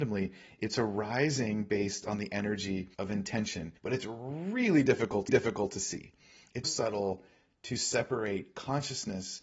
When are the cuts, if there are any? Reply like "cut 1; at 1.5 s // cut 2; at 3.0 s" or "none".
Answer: cut 1; at 2.9 s // cut 2; at 3.8 s // cut 3; at 5.3 s // cut 4; at 6.6 s